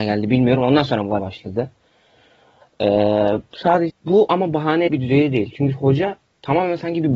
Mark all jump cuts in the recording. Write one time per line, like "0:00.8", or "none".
0:01.2
0:03.9
0:04.9